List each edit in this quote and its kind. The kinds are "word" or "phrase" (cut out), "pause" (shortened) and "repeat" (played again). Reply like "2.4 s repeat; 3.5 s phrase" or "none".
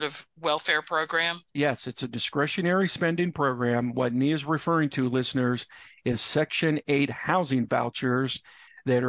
1.5 s pause